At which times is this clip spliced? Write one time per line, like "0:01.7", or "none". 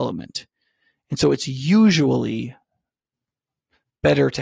none